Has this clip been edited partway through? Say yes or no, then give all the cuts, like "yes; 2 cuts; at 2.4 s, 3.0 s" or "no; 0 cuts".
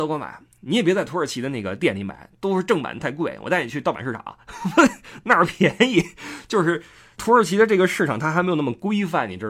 no; 0 cuts